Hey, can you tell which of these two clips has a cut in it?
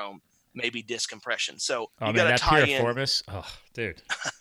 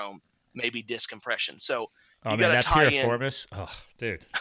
first; 1 cut; at 1.9 s

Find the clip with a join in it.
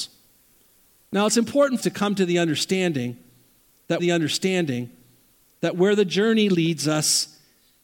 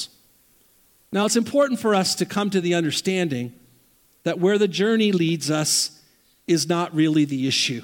first; 2 cuts; at 1.8 s, 4.0 s

